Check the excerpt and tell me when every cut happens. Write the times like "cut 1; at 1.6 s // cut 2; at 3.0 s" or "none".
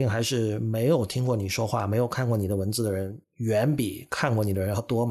cut 1; at 3.2 s